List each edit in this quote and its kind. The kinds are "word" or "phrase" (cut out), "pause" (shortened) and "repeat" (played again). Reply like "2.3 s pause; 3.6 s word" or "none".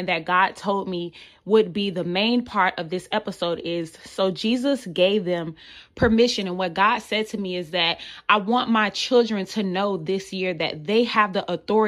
none

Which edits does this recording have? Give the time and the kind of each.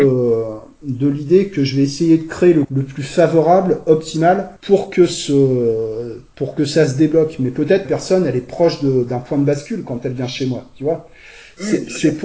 2.6 s phrase; 4.6 s pause; 7.8 s phrase

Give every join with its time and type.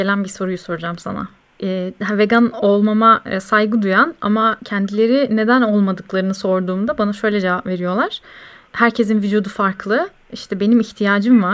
1.4 s pause

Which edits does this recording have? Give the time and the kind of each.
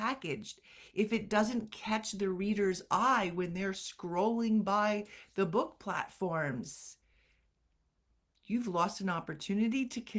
none

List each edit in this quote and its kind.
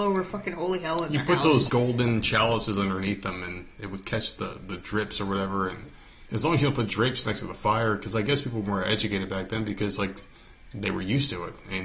1.7 s word

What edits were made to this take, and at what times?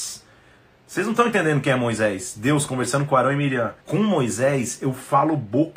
3.8 s pause

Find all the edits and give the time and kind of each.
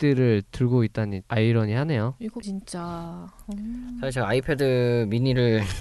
1.2 s word; 2.4 s word

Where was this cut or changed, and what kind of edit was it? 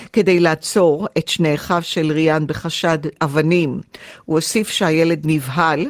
3.2 s word

